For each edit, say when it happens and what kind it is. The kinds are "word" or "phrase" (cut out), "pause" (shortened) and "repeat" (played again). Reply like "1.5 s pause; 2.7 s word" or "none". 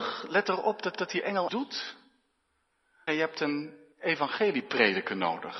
0.9 s repeat; 1.5 s phrase; 3.1 s phrase; 3.9 s pause